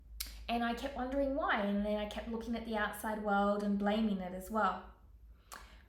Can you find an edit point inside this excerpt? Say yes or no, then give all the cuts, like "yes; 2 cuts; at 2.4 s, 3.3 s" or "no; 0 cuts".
no; 0 cuts